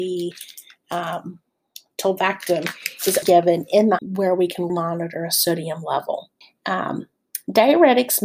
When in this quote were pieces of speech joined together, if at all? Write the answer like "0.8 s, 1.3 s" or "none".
3.2 s, 4.0 s, 4.7 s, 6.4 s